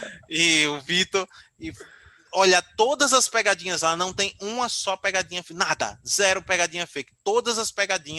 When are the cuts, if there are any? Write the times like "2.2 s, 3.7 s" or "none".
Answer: none